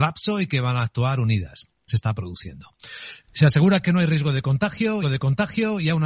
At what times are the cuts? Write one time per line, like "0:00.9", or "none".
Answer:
0:01.9
0:05.0